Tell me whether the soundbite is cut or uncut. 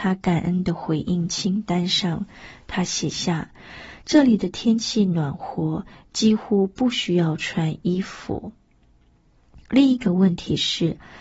uncut